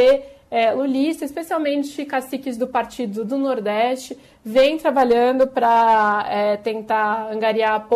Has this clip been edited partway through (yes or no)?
no